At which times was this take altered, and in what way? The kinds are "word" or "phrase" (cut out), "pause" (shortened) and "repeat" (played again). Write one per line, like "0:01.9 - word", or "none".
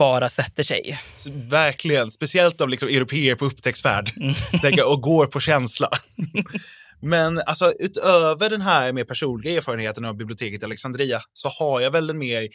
none

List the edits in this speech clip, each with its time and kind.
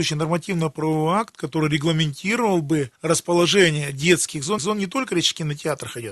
0:03.0 - pause
0:04.6 - repeat

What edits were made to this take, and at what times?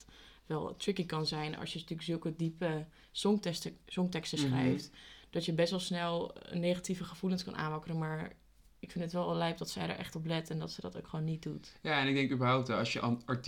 none

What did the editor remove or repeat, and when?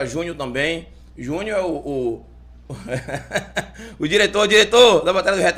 none

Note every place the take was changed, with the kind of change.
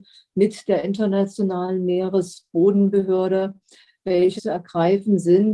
0:04.4 - word

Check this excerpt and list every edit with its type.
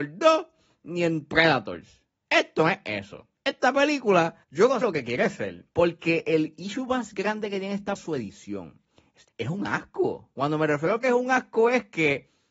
0:03.3 - pause
0:04.4 - pause
0:04.8 - word
0:05.7 - pause
0:08.0 - word
0:09.3 - word

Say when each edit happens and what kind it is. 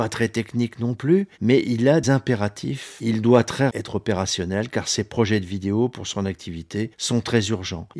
0:02.0 - word
0:03.7 - word

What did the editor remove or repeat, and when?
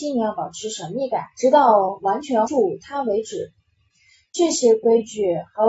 0:01.3 - pause
0:02.4 - word

